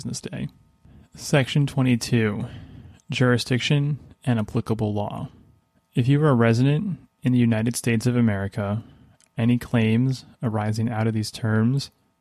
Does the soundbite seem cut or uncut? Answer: uncut